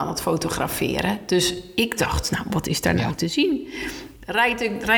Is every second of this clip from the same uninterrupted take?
yes; 0 cuts

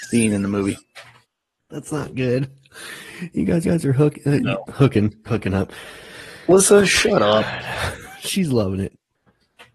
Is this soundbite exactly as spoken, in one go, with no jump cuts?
no; 3 cuts; at 1.2 s, 3.6 s, 5.3 s

